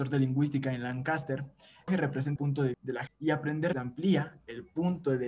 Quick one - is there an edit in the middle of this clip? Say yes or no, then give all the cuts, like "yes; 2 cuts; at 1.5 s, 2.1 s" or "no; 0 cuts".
yes; 5 cuts; at 1.9 s, 2.4 s, 2.7 s, 3.1 s, 3.7 s